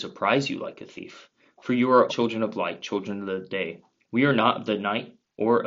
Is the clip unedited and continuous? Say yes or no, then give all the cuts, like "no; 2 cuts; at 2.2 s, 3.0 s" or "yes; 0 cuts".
no; 1 cut; at 2.1 s